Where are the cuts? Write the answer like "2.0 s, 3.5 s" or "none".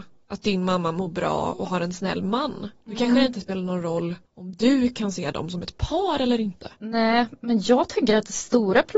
4.3 s, 6.8 s